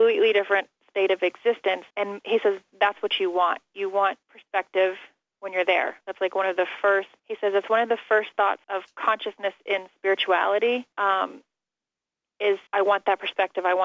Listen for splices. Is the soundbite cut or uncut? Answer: cut